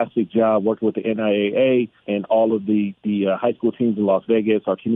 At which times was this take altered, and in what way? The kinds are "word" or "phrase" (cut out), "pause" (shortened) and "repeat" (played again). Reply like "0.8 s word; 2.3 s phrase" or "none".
2.0 s pause